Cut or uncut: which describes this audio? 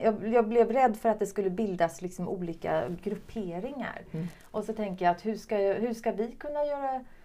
uncut